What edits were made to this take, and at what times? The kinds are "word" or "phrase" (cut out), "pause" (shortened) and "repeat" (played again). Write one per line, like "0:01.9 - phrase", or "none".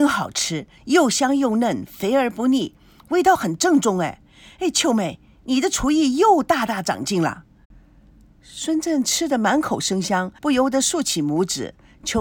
0:10.4 - pause